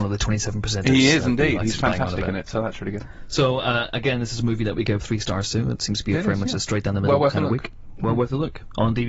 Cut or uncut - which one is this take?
uncut